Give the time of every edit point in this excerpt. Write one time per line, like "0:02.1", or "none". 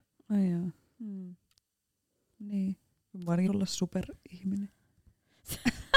0:03.5